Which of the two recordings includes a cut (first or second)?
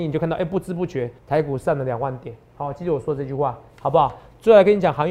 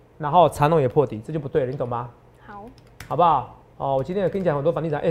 first